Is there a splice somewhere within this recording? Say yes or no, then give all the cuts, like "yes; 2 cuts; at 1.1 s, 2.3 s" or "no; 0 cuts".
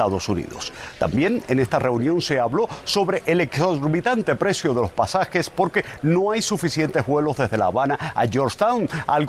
no; 0 cuts